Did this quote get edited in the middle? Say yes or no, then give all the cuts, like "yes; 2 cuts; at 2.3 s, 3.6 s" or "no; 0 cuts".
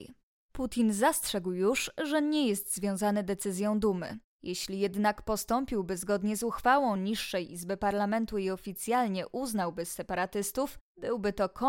no; 0 cuts